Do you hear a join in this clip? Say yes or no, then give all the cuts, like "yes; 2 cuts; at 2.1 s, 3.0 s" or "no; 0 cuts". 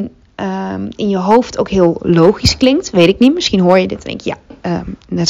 no; 0 cuts